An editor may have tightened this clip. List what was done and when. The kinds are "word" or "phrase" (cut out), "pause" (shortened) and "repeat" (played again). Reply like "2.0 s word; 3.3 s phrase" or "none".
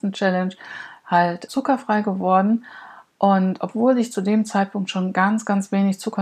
1.5 s word